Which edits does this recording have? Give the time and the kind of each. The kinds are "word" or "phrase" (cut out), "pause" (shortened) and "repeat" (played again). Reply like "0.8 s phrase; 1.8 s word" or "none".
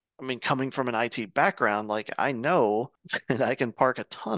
3.0 s pause